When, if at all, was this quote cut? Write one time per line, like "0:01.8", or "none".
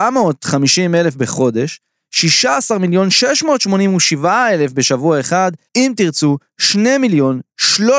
0:05.7